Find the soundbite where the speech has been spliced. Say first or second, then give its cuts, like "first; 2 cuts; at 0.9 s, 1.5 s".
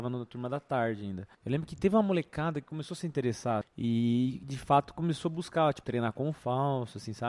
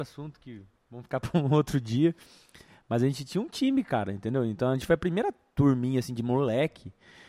first; 4 cuts; at 1.3 s, 3.6 s, 4.4 s, 5.8 s